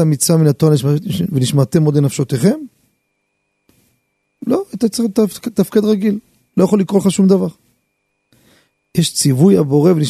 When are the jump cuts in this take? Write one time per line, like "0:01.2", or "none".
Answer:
none